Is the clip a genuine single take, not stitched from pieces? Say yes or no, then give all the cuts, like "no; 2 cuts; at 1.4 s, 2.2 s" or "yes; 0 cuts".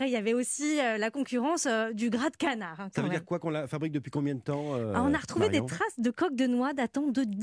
yes; 0 cuts